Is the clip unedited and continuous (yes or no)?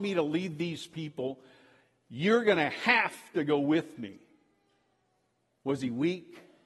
yes